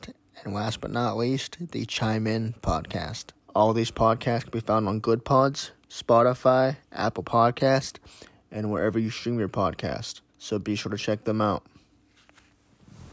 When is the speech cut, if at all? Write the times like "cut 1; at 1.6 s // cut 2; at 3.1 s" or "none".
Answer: cut 1; at 3.4 s // cut 2; at 10.3 s